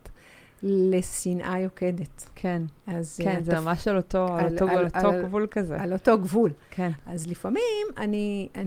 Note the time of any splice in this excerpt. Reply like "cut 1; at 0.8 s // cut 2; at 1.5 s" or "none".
cut 1; at 2.8 s